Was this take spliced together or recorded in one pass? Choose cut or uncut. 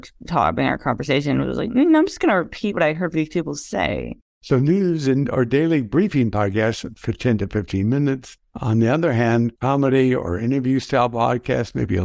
cut